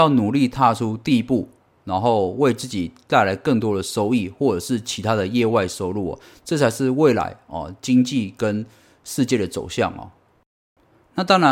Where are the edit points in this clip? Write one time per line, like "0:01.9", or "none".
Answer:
none